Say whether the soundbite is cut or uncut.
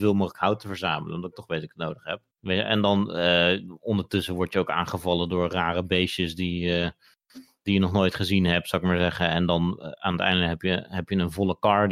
cut